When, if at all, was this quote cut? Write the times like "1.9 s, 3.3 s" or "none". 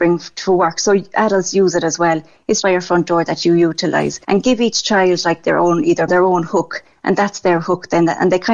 2.6 s, 4.2 s, 6.1 s